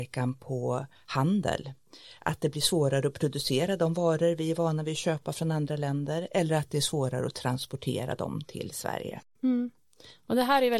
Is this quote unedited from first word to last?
yes; 0 cuts

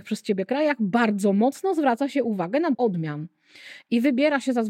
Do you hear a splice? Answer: yes; 1 cut; at 2.7 s

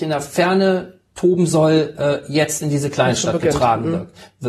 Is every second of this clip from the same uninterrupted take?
yes; 0 cuts

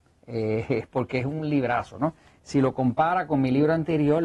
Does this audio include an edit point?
no; 0 cuts

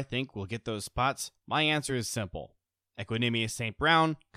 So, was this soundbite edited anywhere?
no; 0 cuts

